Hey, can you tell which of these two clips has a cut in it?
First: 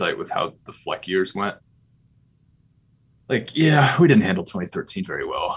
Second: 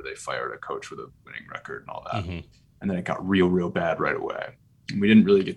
second; 1 cut; at 2.5 s

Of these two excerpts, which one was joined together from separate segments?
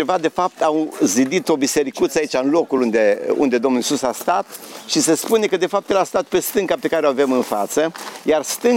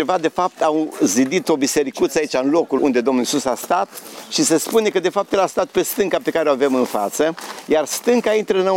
second; 1 cut; at 2.8 s

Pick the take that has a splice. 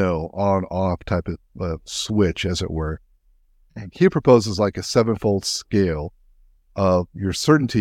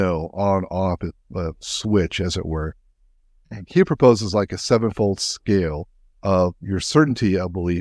second; 2 cuts; at 1.0 s, 6.1 s

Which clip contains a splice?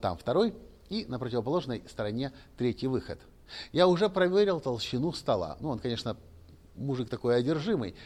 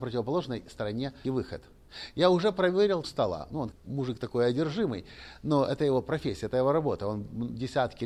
second; 3 cuts; at 1.2 s, 3.0 s, 3.7 s

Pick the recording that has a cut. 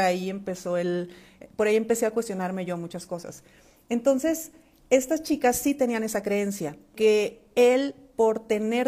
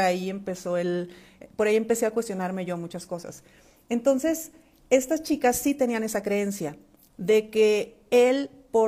first; 1 cut; at 6.9 s

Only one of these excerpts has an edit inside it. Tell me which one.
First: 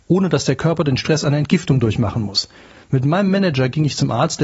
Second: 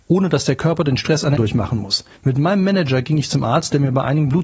second; 2 cuts; at 1.4 s, 2.2 s

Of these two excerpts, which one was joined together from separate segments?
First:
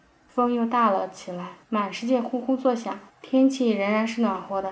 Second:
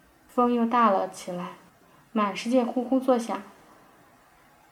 first; 2 cuts; at 1.6 s, 3.1 s

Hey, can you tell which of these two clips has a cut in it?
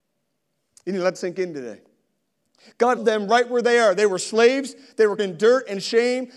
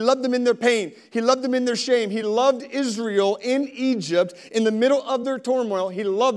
first; 3 cuts; at 1.1 s, 3.0 s, 5.2 s

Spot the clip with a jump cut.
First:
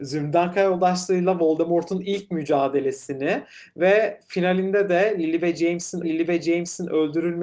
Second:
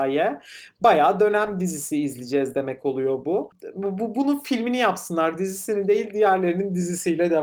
first; 1 cut; at 6.0 s

